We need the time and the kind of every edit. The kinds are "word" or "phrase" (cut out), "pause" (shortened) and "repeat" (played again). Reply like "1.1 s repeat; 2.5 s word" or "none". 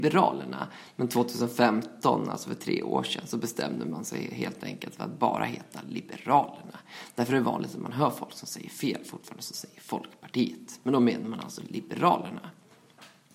none

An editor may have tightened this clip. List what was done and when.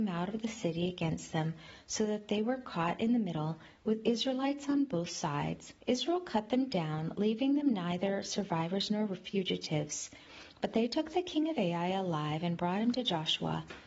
5.8 s pause

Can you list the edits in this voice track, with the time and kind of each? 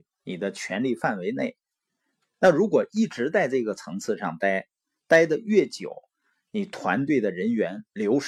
none

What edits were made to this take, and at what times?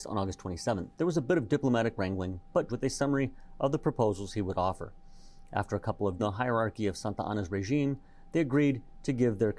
0.9 s pause; 2.7 s phrase; 6.2 s phrase

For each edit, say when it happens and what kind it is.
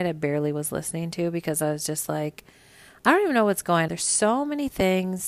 3.9 s word

